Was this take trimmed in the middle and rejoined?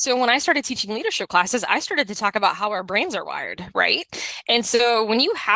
no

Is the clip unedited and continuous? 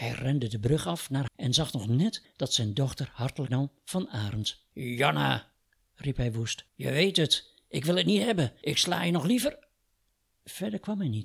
no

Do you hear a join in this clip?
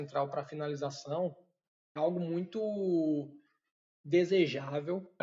yes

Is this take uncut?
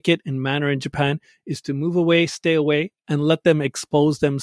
yes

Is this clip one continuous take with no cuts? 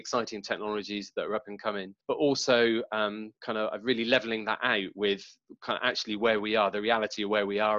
no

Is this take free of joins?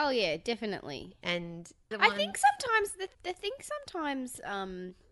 no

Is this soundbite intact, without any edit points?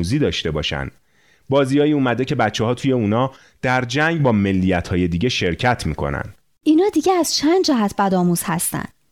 yes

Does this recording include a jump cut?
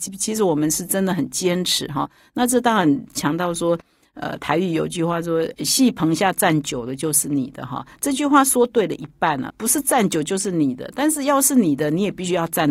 yes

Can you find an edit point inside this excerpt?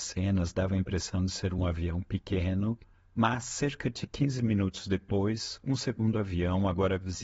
no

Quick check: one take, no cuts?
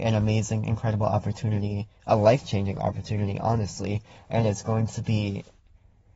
yes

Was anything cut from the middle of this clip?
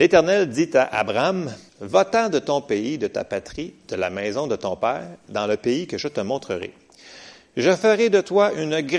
yes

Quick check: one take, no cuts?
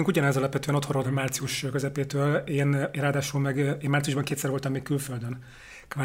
no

